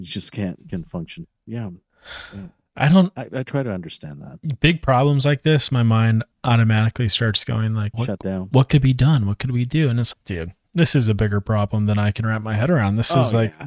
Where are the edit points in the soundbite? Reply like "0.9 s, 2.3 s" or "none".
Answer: 1.4 s, 6.3 s, 7.9 s, 10.1 s